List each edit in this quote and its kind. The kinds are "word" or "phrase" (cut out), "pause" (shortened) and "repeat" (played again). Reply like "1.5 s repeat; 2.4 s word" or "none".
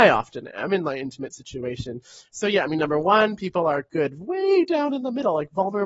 none